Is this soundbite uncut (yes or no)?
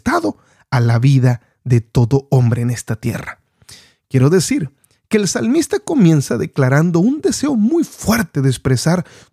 yes